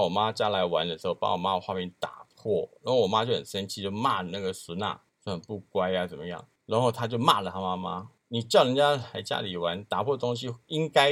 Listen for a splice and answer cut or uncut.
uncut